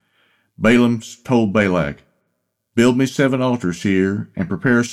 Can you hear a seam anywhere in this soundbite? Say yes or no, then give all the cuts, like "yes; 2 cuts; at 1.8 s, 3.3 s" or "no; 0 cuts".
no; 0 cuts